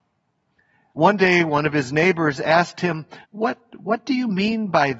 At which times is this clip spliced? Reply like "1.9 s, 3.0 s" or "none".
3.2 s